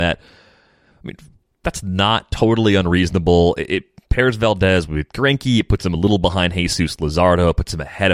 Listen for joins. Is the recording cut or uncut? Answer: uncut